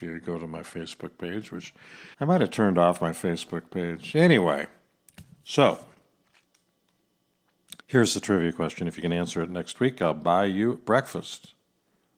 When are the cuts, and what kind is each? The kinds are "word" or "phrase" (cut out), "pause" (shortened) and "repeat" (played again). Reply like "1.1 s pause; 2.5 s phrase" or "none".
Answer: 2.1 s pause; 7.8 s pause

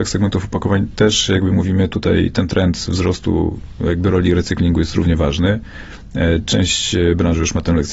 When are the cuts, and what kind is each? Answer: none

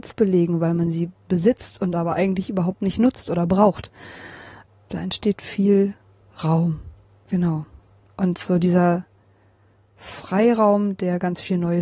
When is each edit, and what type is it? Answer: none

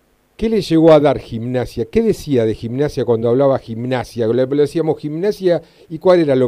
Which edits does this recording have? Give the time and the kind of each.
none

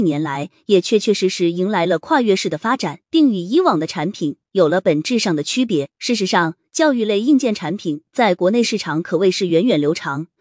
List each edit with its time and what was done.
3.0 s pause; 5.9 s pause

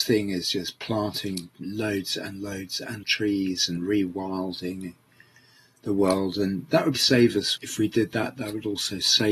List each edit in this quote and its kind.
3.0 s phrase; 6.9 s word; 7.6 s word

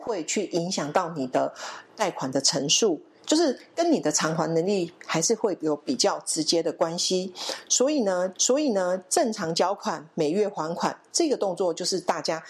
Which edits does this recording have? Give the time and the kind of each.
8.3 s repeat

